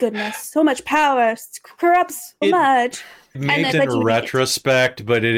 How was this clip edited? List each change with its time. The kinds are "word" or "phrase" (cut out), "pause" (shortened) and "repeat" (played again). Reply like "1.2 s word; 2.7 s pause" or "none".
2.4 s word; 3.3 s word; 3.7 s word